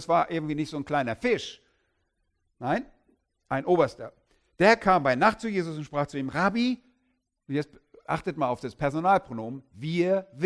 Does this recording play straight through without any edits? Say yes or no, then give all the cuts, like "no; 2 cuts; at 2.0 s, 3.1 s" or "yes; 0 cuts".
yes; 0 cuts